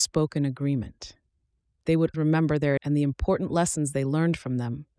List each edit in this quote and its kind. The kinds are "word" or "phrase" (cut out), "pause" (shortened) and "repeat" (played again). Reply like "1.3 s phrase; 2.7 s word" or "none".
2.1 s word; 2.8 s word